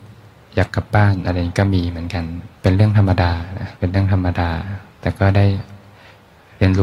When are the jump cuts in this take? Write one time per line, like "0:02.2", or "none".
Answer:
0:02.6
0:03.8